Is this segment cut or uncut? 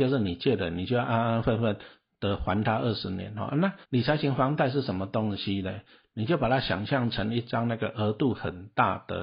cut